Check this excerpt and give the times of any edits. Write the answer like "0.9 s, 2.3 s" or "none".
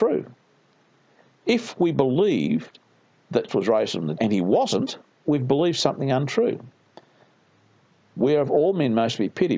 3.5 s, 4.2 s, 5.2 s

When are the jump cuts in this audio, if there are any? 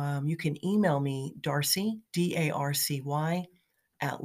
2.0 s

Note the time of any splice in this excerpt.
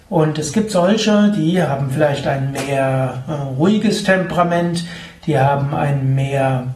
none

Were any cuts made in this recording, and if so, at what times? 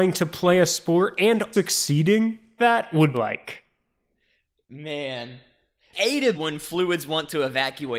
1.5 s, 2.6 s, 3.1 s, 5.9 s, 6.3 s

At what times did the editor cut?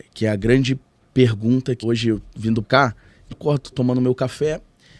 1.8 s, 2.6 s, 3.3 s, 3.7 s

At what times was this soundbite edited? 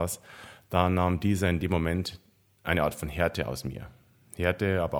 none

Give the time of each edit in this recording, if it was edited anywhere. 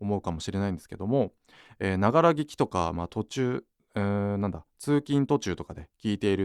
none

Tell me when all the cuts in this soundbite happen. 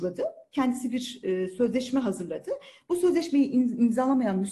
none

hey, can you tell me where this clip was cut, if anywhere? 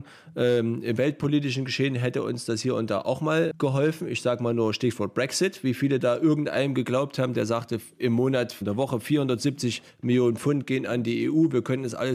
8.6 s

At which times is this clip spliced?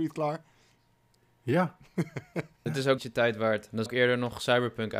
2.7 s, 3.0 s, 3.9 s

